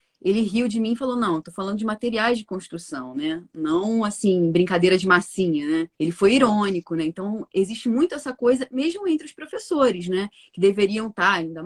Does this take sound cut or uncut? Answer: cut